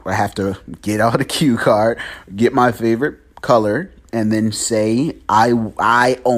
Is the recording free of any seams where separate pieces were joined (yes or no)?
yes